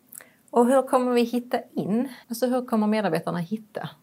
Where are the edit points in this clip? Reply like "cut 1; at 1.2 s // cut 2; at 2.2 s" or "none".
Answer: cut 1; at 2.2 s